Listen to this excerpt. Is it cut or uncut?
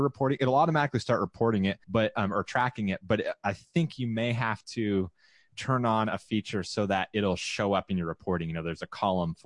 cut